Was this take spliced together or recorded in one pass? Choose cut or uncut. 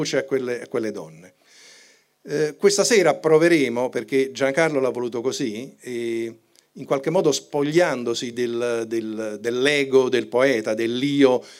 uncut